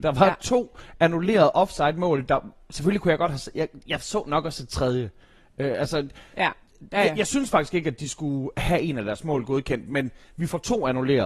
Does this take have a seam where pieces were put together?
no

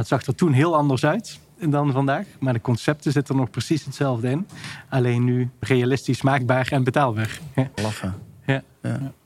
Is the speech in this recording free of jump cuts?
no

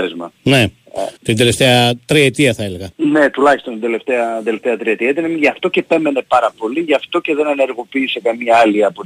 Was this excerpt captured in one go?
no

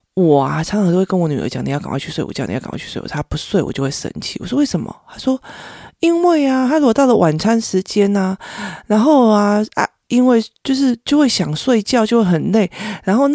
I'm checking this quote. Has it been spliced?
yes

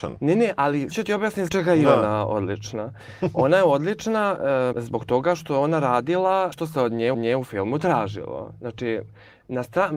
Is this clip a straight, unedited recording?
no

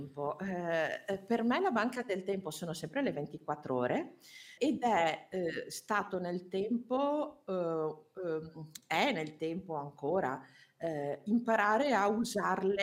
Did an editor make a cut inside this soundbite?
yes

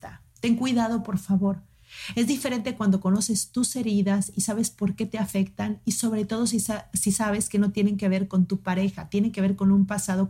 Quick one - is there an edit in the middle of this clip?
no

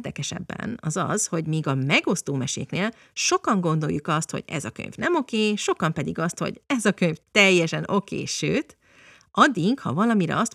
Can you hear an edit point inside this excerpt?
no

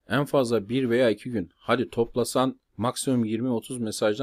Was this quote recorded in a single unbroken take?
no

